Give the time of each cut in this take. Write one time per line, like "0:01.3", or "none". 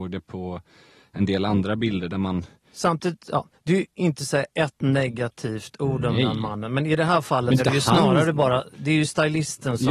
0:03.9
0:07.6